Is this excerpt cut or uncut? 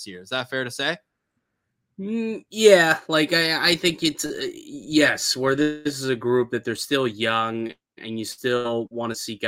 uncut